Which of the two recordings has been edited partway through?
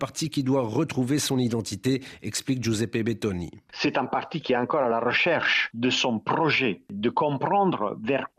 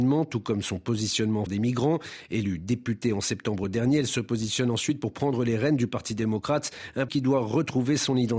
second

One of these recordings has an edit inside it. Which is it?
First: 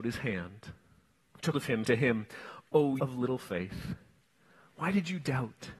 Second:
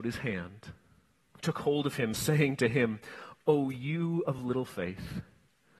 first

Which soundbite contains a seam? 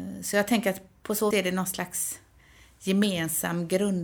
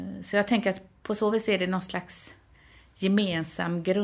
first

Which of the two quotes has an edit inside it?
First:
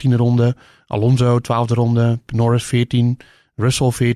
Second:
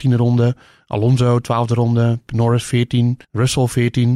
second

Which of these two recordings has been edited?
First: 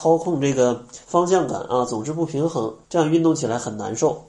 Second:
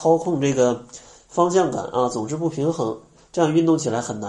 first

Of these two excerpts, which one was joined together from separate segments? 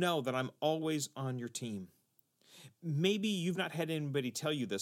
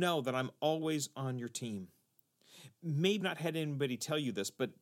second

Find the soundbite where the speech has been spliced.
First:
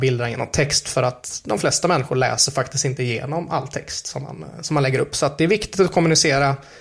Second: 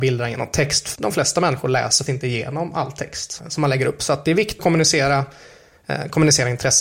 second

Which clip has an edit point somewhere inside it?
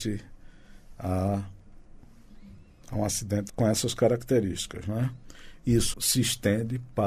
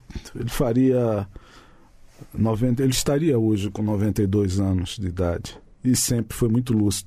first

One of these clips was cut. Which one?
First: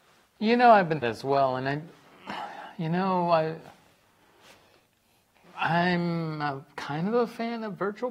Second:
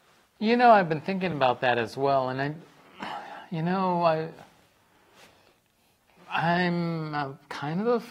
first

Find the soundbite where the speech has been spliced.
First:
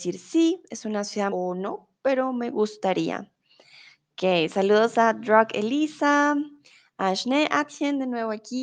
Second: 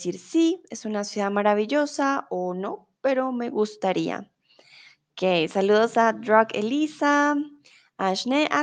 first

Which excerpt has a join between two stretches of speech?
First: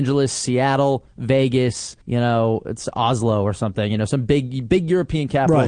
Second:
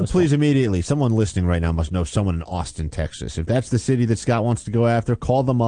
first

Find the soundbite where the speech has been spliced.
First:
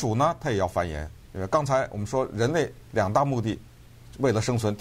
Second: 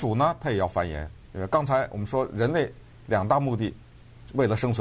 first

